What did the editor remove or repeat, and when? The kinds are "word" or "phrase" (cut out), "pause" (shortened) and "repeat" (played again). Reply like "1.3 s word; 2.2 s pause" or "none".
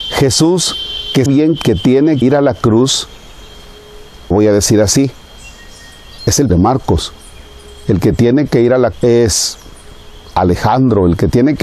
1.3 s word; 1.6 s word; 2.2 s word; 4.3 s word; 6.2 s word; 6.5 s word; 8.9 s word; 10.3 s word